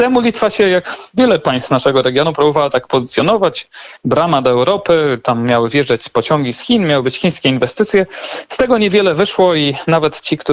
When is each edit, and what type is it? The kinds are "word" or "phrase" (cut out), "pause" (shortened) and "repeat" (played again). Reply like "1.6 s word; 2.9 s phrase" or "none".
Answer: none